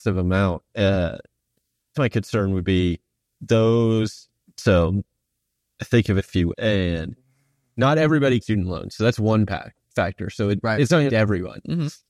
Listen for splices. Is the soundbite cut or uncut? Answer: cut